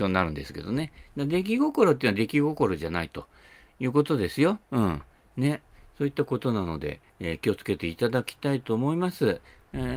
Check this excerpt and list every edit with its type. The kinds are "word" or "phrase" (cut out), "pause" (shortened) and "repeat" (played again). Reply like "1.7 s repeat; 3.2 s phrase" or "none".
4.6 s pause; 7.1 s pause

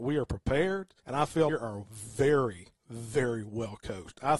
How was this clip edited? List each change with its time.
1.0 s pause; 1.5 s phrase; 2.8 s pause

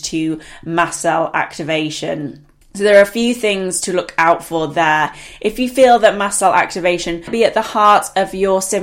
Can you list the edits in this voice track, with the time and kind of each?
2.6 s pause

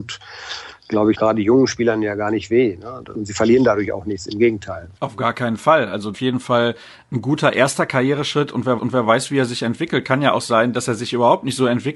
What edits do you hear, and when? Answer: 1.1 s word; 5.0 s pause; 6.1 s phrase; 8.8 s repeat

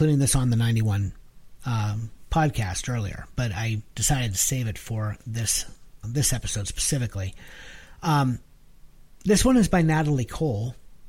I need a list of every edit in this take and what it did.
6.0 s word

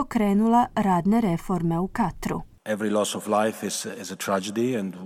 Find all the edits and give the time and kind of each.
none

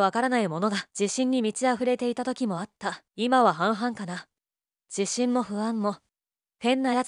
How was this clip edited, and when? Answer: 0.9 s pause; 3.1 s pause

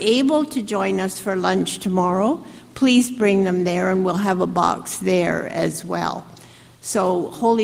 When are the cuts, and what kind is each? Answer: none

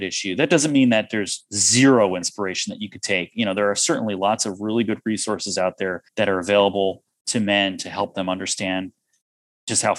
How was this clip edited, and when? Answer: 6.1 s pause

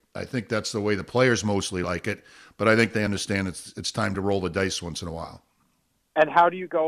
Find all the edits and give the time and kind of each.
none

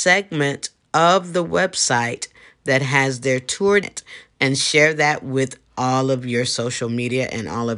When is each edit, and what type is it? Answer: 3.8 s phrase

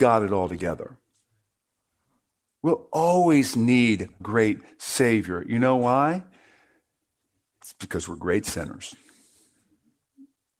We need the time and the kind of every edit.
4.2 s word

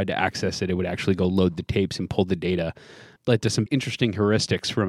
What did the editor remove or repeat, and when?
3.2 s word; 3.7 s word

